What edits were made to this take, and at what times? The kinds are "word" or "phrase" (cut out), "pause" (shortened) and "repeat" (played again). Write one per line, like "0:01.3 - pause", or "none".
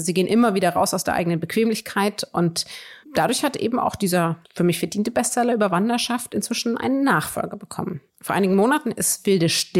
0:03.0 - pause
0:04.4 - pause
0:08.1 - pause